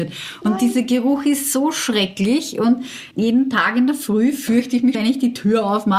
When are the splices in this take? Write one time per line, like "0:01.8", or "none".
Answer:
0:03.1
0:04.9